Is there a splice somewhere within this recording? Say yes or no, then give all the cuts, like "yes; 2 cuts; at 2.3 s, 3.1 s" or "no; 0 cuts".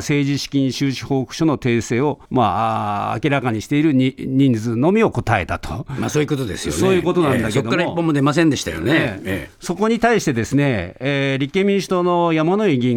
yes; 1 cut; at 2.2 s